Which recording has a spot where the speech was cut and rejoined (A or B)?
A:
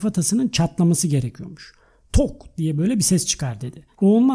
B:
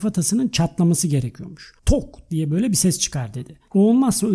B